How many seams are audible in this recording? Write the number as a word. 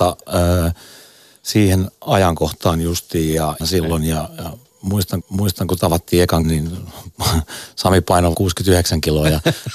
four